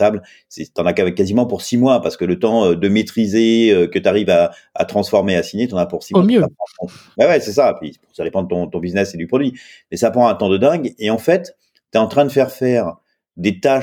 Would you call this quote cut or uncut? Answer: uncut